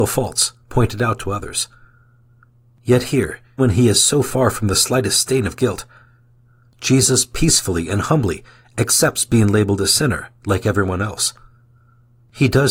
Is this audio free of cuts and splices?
no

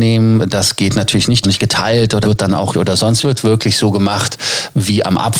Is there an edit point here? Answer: yes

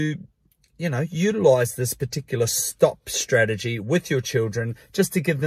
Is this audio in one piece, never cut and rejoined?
yes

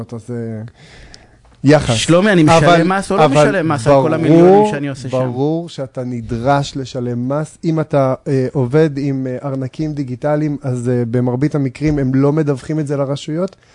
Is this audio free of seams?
yes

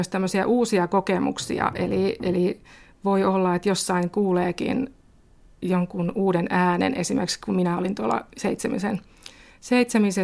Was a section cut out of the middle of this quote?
no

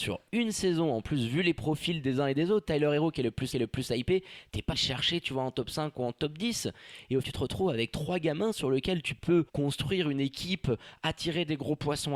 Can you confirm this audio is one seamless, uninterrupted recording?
no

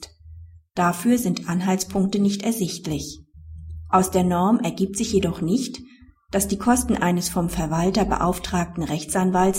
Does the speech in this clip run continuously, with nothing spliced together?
yes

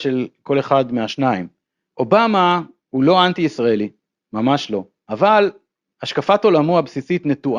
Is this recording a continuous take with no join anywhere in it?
no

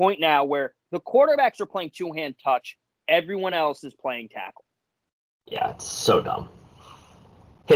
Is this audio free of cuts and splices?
yes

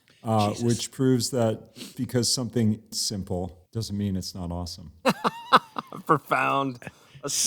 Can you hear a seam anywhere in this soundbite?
yes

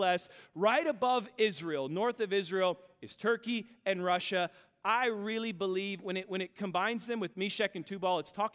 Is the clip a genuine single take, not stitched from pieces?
yes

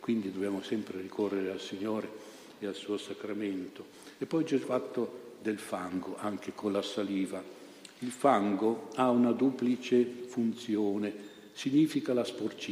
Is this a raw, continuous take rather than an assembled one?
no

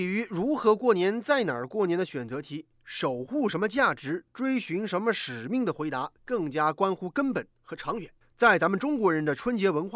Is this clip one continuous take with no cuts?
no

